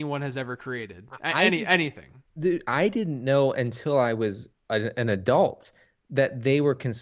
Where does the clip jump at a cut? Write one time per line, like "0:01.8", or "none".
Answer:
0:02.3